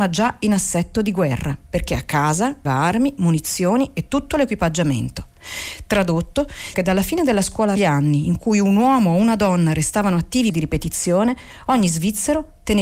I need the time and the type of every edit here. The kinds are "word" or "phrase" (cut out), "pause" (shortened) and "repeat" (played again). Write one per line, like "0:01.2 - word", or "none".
0:02.6 - word
0:06.7 - word
0:07.8 - phrase
0:10.5 - phrase